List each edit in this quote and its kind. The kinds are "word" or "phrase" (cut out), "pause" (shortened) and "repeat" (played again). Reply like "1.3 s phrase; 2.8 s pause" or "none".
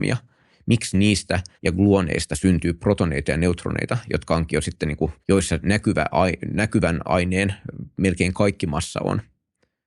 1.5 s pause; 5.2 s pause